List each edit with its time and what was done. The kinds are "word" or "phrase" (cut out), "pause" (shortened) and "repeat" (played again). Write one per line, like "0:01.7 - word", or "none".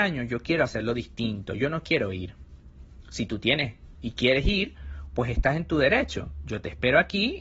none